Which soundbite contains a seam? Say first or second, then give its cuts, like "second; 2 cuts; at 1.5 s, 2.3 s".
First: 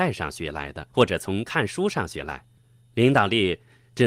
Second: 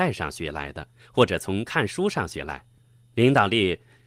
first; 1 cut; at 0.9 s